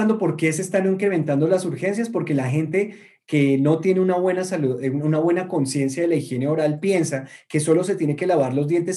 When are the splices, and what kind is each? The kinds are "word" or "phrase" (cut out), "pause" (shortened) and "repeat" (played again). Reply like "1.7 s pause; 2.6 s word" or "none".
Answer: none